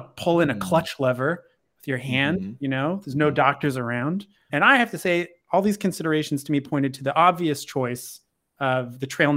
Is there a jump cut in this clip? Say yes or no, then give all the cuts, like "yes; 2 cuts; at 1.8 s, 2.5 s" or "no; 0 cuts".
yes; 1 cut; at 4.5 s